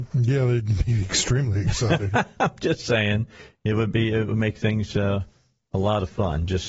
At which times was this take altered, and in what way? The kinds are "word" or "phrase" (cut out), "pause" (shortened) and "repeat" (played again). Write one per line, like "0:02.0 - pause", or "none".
none